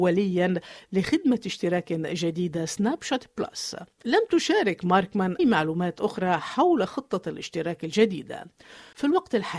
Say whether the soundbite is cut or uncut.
cut